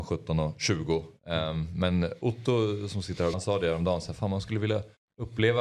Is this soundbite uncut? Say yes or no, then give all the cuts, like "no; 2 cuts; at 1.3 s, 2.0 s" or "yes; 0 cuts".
no; 1 cut; at 3.3 s